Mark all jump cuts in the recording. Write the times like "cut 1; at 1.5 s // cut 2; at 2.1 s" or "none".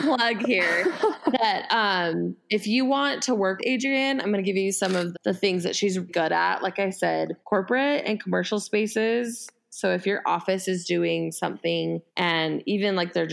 cut 1; at 3.6 s // cut 2; at 5.1 s // cut 3; at 6.1 s // cut 4; at 7.4 s // cut 5; at 12.1 s